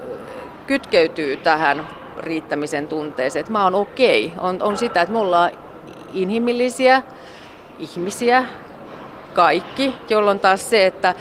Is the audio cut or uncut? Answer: uncut